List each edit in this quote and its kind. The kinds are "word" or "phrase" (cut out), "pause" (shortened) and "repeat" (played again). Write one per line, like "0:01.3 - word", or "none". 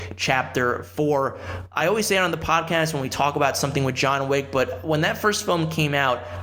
none